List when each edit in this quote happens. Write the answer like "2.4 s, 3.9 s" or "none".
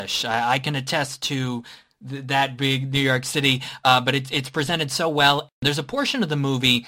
none